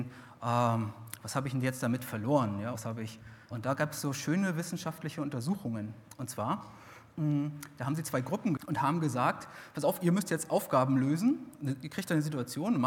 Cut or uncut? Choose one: cut